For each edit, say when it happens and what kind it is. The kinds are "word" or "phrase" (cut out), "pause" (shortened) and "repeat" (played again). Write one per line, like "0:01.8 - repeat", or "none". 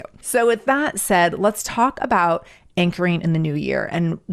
none